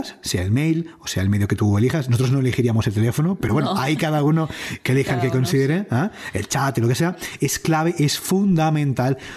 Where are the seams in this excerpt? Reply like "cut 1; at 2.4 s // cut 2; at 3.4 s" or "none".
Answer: none